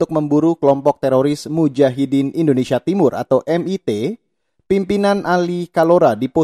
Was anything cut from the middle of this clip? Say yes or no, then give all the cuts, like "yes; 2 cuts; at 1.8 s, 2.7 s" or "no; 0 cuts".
no; 0 cuts